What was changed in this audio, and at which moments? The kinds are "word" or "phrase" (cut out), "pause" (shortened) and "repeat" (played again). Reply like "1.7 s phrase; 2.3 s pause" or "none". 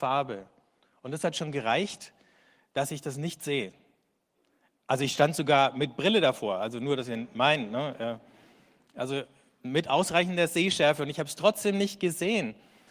none